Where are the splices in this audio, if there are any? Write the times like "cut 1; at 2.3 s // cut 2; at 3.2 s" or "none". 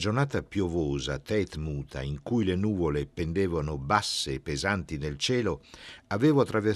cut 1; at 1.6 s